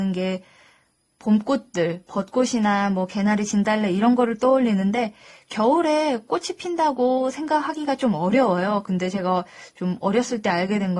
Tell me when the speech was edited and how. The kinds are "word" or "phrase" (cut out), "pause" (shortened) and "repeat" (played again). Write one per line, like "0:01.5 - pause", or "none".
none

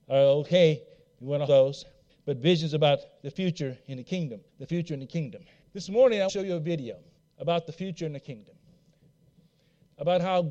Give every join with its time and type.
0:01.5 - phrase
0:02.1 - pause
0:04.5 - pause
0:05.6 - pause
0:06.3 - word
0:07.2 - pause

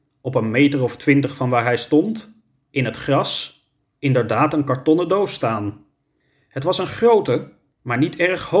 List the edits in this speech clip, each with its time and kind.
none

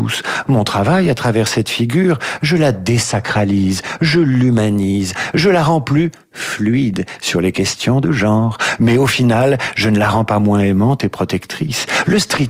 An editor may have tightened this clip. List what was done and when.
none

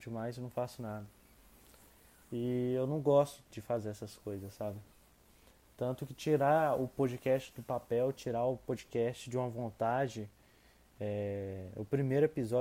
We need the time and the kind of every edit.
0:03.5 - word

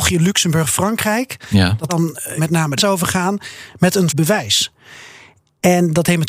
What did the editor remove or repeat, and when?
0:01.9 - word
0:02.4 - word
0:02.8 - word
0:04.1 - word

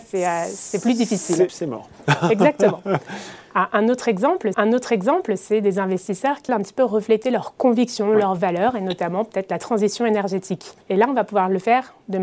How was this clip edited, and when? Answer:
0:01.5 - word
0:04.5 - repeat
0:06.5 - word
0:10.8 - pause

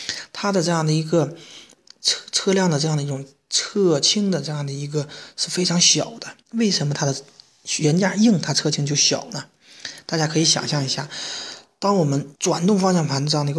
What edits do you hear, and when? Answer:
0:06.4 - pause
0:12.3 - pause

